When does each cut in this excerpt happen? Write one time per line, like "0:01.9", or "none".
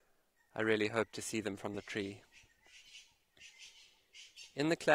none